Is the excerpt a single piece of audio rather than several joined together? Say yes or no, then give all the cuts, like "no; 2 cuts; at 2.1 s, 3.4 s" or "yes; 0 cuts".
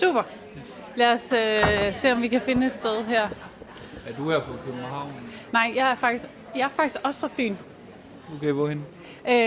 yes; 0 cuts